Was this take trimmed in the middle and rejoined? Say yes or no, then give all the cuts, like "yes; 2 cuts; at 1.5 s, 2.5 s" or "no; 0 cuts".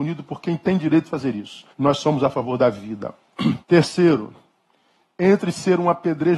yes; 2 cuts; at 1.7 s, 3.6 s